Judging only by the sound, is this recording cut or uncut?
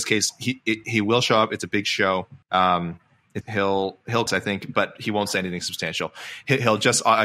cut